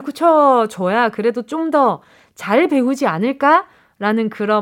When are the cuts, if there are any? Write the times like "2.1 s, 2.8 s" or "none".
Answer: none